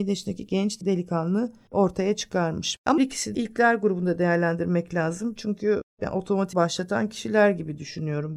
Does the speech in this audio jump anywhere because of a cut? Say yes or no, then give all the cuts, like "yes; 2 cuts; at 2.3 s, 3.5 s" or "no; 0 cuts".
yes; 3 cuts; at 3.0 s, 3.3 s, 6.5 s